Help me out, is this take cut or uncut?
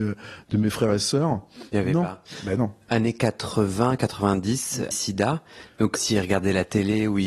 cut